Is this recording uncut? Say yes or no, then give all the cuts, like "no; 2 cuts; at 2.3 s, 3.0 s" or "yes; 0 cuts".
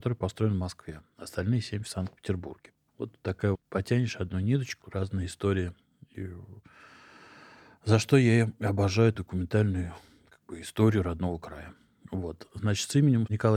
no; 3 cuts; at 3.5 s, 4.8 s, 9.1 s